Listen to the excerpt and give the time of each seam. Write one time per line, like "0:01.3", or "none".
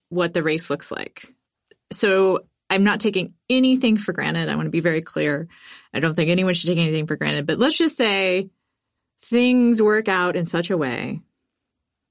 none